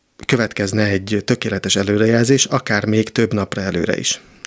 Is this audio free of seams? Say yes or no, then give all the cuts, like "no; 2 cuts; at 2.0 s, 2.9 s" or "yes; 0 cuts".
yes; 0 cuts